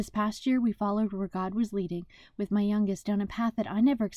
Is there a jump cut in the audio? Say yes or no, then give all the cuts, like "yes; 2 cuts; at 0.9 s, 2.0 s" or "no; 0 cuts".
no; 0 cuts